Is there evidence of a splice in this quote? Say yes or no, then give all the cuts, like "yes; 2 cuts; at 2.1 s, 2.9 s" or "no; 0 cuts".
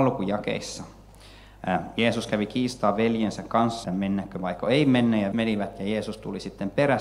yes; 2 cuts; at 3.8 s, 5.3 s